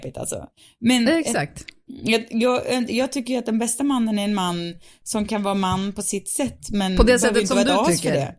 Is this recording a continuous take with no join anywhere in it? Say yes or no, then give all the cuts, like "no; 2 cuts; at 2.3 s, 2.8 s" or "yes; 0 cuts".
yes; 0 cuts